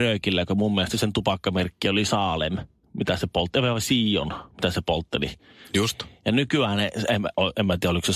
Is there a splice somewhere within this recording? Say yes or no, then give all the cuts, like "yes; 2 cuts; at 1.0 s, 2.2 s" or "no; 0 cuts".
no; 0 cuts